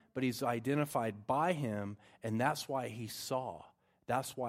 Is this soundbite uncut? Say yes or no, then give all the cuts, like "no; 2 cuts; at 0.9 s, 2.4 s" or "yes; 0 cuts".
yes; 0 cuts